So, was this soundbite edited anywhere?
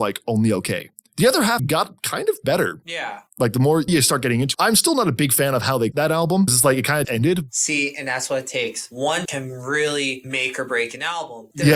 yes; 7 cuts; at 1.6 s, 3.9 s, 4.5 s, 5.9 s, 6.5 s, 7.0 s, 9.3 s

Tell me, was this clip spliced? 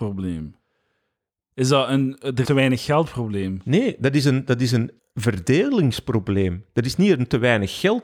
yes; 2 cuts; at 2.4 s, 5.0 s

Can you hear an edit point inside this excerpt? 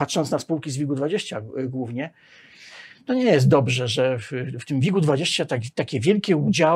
no; 0 cuts

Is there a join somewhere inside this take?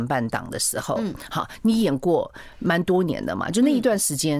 no; 0 cuts

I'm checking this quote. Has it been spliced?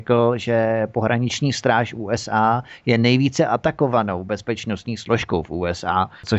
no; 0 cuts

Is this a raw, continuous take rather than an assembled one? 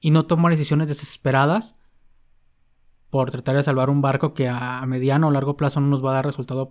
yes; 0 cuts

